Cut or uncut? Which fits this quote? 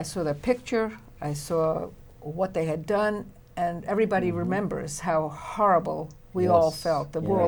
uncut